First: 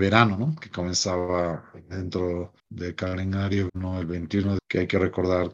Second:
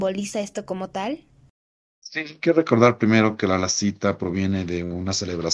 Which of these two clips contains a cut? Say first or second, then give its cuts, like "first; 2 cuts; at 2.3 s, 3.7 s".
first; 3 cuts; at 2.6 s, 3.7 s, 4.6 s